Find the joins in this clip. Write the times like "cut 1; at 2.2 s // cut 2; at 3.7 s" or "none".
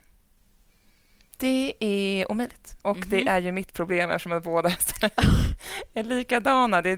cut 1; at 2.8 s